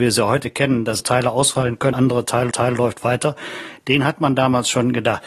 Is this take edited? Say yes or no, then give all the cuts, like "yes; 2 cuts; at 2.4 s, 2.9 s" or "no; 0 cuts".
yes; 3 cuts; at 1.0 s, 1.9 s, 2.5 s